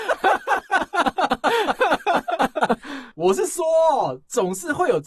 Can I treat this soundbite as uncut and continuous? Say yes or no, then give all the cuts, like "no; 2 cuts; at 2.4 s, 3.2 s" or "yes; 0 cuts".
no; 1 cut; at 3.1 s